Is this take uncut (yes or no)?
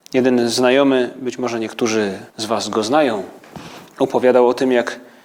no